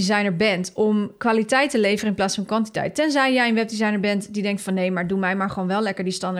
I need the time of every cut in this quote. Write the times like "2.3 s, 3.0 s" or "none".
none